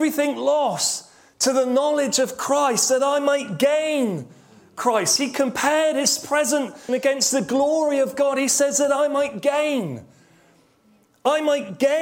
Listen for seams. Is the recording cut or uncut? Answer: cut